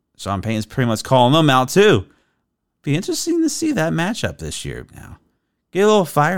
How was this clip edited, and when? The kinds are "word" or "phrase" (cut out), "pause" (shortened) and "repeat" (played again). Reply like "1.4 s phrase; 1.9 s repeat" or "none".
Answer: 4.9 s word